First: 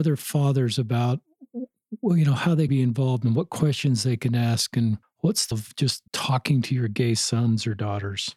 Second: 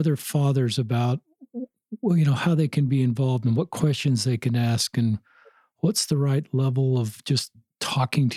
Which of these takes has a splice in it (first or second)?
first